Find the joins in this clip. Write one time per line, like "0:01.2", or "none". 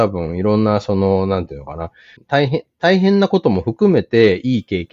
0:02.2